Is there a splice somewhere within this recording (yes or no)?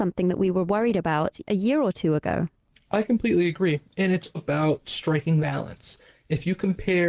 yes